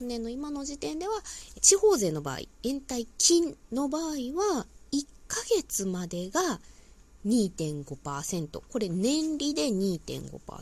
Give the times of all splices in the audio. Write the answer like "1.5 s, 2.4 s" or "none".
1.5 s